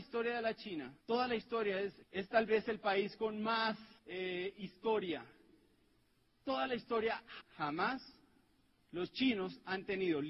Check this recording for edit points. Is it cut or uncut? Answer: cut